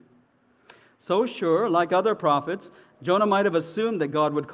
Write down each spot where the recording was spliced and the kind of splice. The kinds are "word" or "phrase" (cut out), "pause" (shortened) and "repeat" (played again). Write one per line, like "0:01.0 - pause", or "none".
none

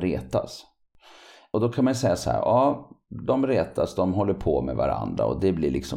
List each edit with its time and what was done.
none

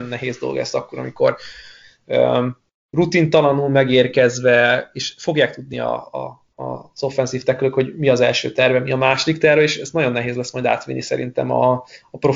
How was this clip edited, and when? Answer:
none

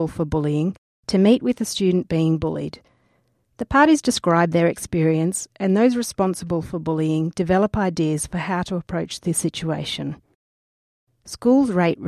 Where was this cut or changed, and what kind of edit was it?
none

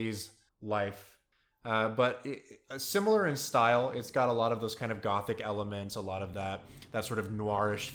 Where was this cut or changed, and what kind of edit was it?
none

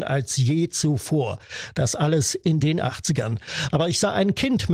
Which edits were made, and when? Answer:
none

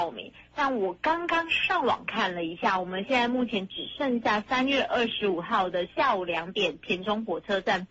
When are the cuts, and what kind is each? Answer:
none

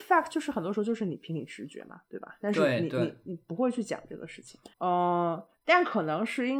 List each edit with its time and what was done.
0:04.7 - pause

